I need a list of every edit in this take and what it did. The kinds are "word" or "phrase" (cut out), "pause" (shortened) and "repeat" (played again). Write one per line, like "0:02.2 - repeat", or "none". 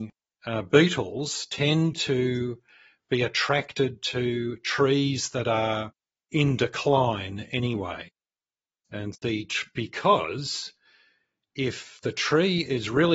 0:09.1 - word